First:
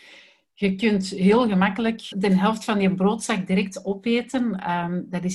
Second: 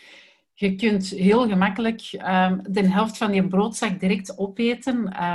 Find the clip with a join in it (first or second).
first